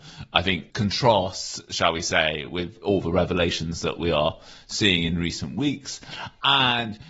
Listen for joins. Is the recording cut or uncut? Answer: uncut